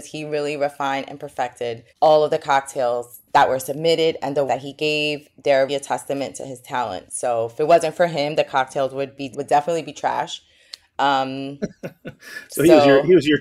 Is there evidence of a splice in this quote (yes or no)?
yes